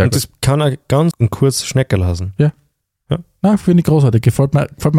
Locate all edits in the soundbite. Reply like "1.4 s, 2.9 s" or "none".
1.1 s

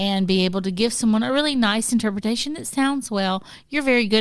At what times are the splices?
none

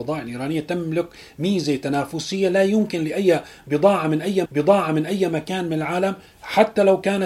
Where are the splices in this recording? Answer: 4.5 s

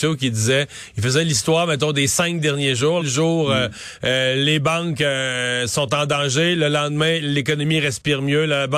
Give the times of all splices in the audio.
3.0 s

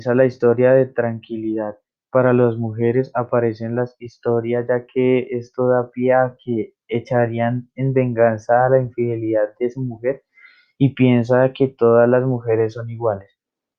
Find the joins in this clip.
none

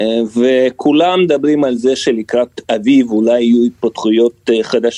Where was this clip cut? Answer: none

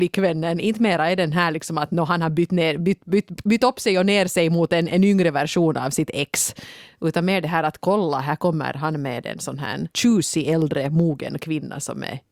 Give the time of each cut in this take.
9.9 s

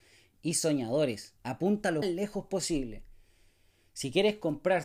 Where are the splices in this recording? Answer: 1.4 s, 2.0 s, 2.5 s

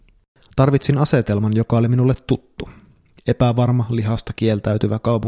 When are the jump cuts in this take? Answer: none

